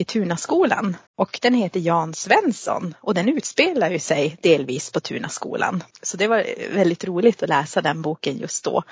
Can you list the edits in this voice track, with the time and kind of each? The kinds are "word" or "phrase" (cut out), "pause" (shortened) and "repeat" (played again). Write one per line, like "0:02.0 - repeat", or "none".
0:01.1 - pause
0:05.9 - pause